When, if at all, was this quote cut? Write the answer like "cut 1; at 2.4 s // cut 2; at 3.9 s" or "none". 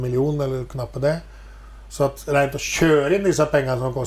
none